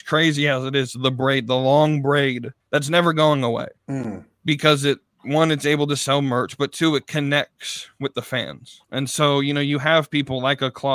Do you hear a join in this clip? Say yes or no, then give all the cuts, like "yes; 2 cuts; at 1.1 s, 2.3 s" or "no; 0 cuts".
yes; 3 cuts; at 2.6 s, 3.8 s, 8.8 s